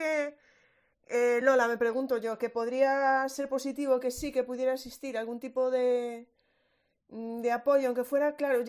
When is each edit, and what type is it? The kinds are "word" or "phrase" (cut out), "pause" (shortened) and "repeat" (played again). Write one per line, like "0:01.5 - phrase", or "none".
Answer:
none